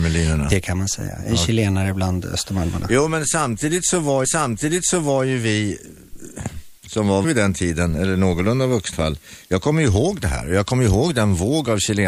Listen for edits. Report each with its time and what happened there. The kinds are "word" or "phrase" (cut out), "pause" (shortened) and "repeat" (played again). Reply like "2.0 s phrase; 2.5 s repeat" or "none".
4.2 s repeat; 6.8 s pause; 7.2 s word; 8.9 s phrase